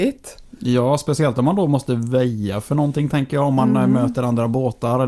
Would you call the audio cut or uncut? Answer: uncut